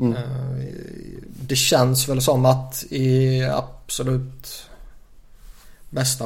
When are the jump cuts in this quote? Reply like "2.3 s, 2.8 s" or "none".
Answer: none